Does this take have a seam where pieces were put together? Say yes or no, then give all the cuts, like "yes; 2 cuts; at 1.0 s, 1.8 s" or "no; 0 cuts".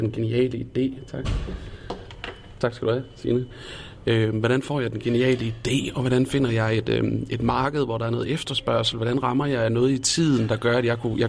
no; 0 cuts